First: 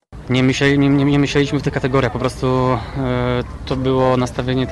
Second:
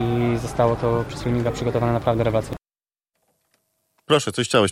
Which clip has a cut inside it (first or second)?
first